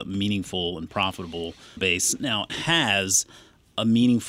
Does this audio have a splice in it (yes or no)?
yes